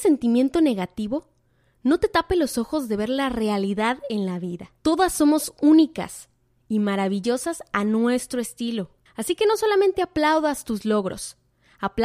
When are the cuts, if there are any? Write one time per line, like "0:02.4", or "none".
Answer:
0:04.8
0:09.1